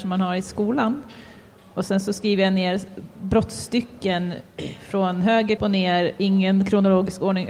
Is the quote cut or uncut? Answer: cut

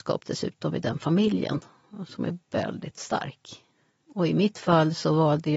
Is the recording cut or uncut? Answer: cut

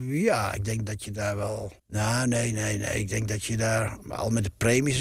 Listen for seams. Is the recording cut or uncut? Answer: cut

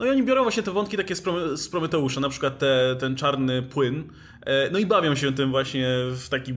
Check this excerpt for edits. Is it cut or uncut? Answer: uncut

